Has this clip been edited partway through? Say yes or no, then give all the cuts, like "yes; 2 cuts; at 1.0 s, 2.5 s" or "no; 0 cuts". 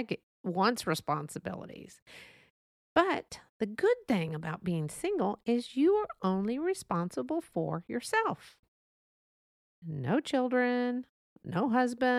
no; 0 cuts